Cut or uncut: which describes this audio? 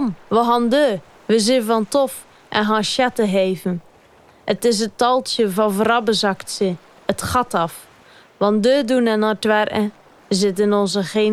uncut